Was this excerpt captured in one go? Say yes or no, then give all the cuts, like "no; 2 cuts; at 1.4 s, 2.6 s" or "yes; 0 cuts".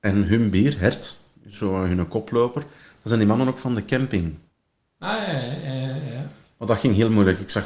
yes; 0 cuts